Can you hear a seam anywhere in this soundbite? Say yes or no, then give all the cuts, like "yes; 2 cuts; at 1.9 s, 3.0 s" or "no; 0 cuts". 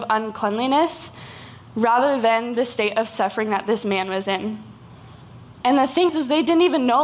yes; 1 cut; at 6.1 s